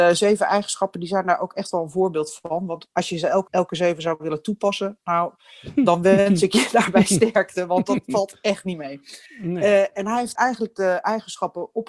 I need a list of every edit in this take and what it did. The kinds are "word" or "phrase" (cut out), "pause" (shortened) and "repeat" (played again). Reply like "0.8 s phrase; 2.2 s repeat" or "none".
3.5 s word; 9.3 s pause; 10.4 s word